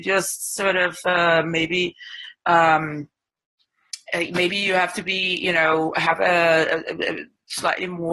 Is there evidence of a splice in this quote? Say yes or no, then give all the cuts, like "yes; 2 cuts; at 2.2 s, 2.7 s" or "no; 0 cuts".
no; 0 cuts